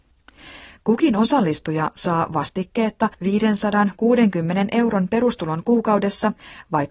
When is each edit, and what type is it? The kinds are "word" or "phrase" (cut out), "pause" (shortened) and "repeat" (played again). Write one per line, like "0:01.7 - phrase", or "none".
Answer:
0:03.1 - pause